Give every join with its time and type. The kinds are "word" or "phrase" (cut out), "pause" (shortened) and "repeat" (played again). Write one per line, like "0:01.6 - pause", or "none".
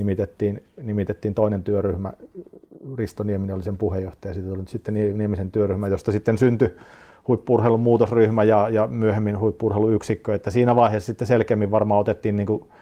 none